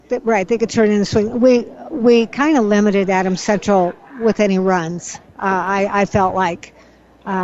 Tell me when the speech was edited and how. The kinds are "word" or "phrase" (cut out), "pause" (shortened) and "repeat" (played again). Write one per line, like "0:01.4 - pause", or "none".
none

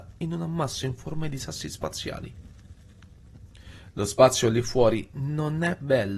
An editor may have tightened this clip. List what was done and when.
none

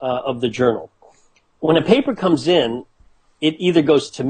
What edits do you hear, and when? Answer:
none

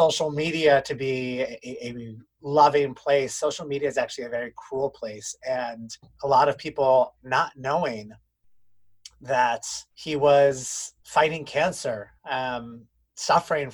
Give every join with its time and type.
0:06.0 - pause
0:09.9 - pause
0:11.0 - pause
0:12.2 - pause

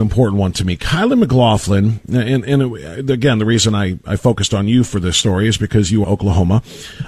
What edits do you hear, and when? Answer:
0:06.0 - phrase

